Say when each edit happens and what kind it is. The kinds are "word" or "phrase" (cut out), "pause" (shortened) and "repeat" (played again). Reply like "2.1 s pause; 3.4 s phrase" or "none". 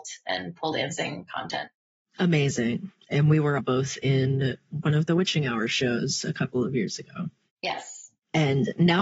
3.6 s word